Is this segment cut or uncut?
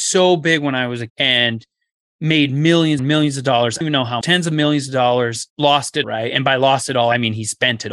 cut